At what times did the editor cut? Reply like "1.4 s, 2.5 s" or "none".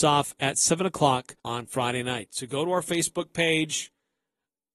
1.4 s